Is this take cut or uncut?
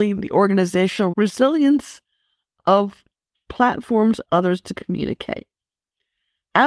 cut